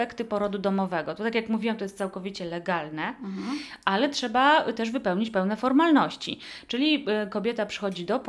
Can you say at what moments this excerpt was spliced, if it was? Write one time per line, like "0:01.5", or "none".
none

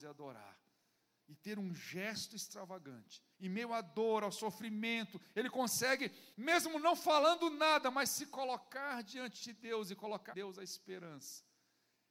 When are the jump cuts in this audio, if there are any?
0:03.3
0:06.3
0:10.3

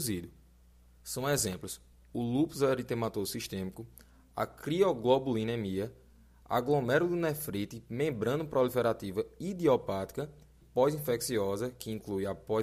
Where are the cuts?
0:10.6

